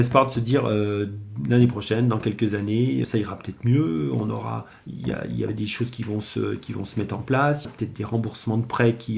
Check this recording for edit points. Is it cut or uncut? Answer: cut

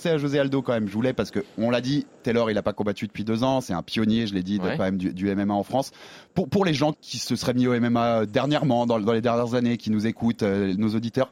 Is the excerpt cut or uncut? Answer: cut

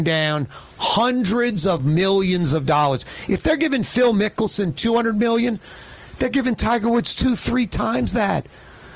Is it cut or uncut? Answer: uncut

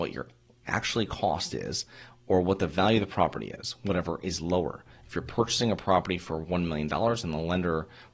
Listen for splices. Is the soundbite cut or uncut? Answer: uncut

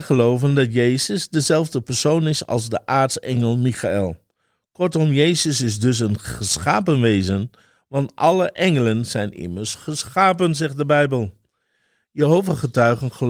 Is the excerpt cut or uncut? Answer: uncut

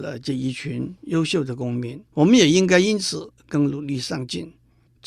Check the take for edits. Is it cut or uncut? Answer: cut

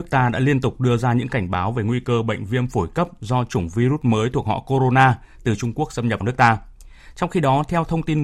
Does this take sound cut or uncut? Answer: cut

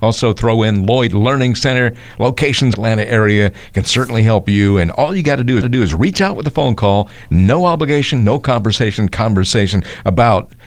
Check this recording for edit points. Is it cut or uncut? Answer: cut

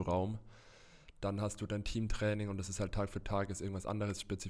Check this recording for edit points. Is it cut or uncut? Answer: uncut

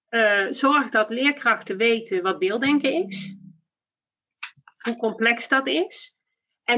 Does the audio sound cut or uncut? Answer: uncut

